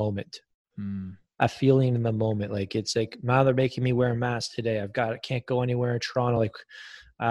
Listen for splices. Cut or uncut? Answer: uncut